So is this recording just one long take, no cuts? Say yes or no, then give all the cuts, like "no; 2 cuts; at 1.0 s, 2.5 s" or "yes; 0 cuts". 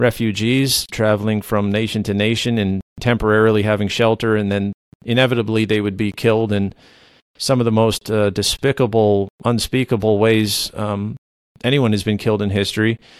yes; 0 cuts